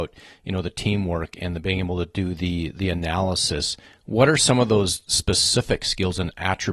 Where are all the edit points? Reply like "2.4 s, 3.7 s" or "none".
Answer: none